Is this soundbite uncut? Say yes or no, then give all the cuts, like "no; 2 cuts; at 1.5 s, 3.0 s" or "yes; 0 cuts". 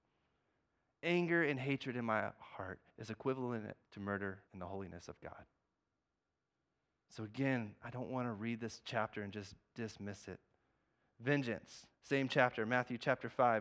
no; 5 cuts; at 2.9 s, 3.8 s, 4.5 s, 5.9 s, 11.9 s